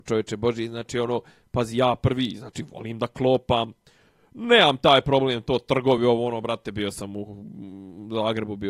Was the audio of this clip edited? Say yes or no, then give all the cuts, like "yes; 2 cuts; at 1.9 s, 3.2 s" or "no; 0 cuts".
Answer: no; 0 cuts